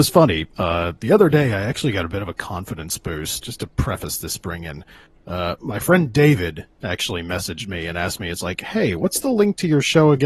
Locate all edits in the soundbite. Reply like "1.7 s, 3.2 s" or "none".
3.4 s